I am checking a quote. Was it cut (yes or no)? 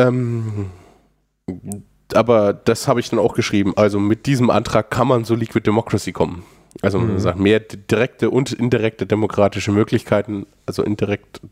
no